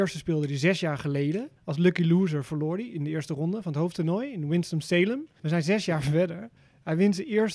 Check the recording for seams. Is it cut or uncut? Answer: cut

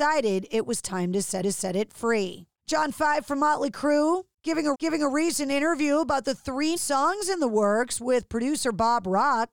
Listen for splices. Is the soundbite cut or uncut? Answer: cut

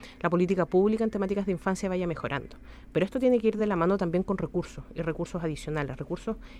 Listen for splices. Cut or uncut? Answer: uncut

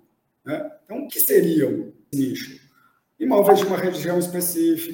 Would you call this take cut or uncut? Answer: cut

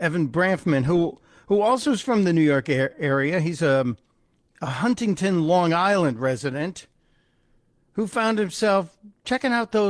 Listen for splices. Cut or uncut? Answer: uncut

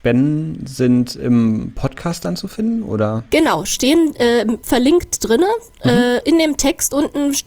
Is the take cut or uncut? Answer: cut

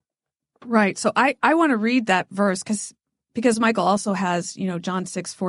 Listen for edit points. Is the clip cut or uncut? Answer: uncut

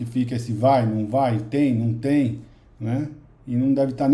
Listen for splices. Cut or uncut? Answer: uncut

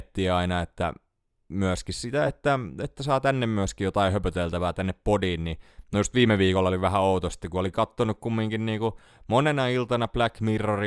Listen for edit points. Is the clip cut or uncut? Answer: uncut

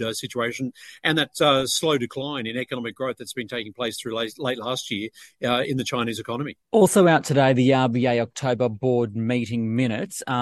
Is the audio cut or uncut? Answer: cut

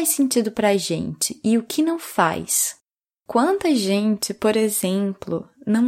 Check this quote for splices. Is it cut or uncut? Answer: uncut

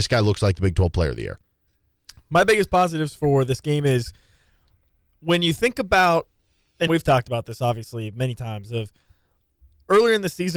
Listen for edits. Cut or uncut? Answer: cut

